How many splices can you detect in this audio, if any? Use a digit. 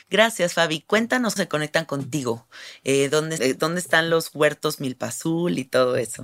2